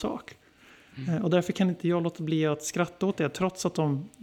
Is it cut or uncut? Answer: uncut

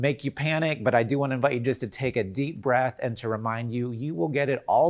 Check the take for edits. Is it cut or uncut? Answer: uncut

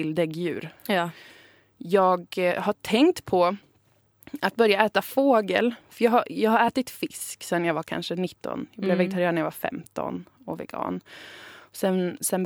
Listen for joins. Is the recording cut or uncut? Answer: uncut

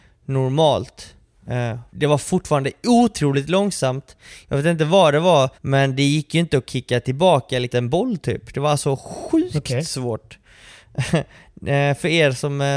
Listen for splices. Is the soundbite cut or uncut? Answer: cut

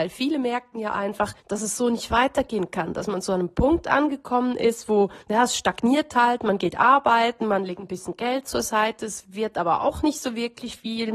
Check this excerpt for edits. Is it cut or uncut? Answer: cut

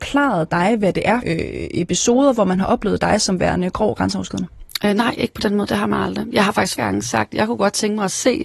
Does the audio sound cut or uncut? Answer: cut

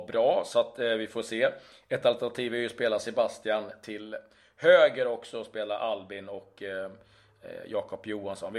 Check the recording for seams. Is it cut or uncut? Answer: uncut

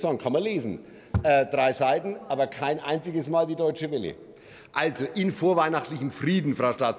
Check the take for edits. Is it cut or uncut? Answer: uncut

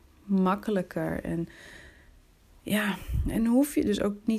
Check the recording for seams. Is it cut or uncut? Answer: uncut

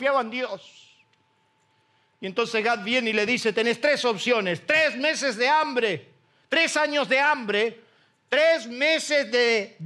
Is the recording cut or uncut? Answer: uncut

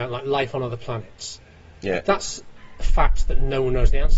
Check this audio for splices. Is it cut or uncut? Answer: cut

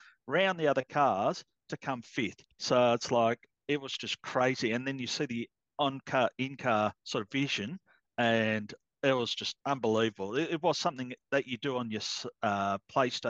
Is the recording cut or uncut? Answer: cut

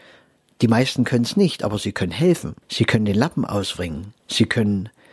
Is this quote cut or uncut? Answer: cut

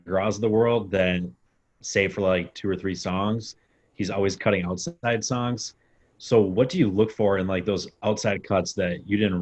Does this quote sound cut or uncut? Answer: uncut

